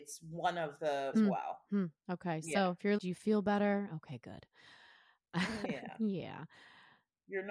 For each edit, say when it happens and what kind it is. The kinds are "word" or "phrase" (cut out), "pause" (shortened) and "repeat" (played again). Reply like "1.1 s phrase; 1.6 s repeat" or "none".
1.1 s phrase; 3.0 s word